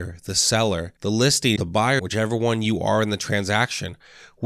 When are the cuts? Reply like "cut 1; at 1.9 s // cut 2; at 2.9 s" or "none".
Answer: cut 1; at 1.0 s // cut 2; at 1.6 s // cut 3; at 2.0 s